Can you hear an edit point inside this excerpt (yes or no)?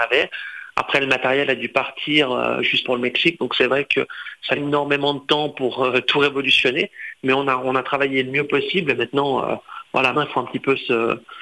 yes